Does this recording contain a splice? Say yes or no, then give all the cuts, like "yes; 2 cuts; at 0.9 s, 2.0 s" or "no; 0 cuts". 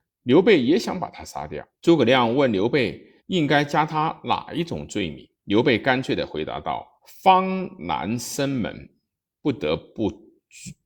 yes; 4 cuts; at 1.7 s, 3.2 s, 5.3 s, 7.0 s